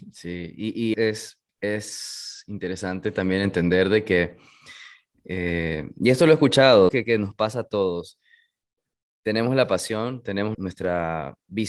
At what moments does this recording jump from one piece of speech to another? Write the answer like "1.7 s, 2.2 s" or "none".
0.9 s, 1.5 s, 6.9 s, 10.5 s